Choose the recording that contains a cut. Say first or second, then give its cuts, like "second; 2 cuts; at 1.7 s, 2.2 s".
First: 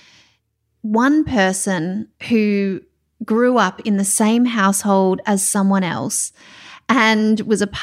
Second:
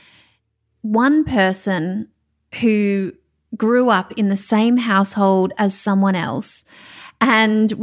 first; 1 cut; at 2.2 s